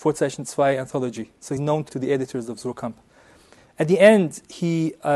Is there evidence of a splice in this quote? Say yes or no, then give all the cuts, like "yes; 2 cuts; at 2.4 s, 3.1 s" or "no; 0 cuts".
yes; 2 cuts; at 1.6 s, 1.9 s